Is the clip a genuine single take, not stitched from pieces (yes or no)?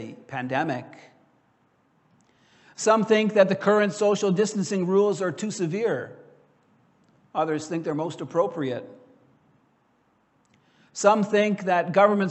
yes